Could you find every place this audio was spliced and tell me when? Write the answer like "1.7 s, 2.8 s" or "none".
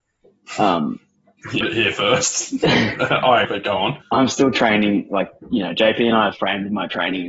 1.6 s, 3.4 s, 4.0 s, 6.3 s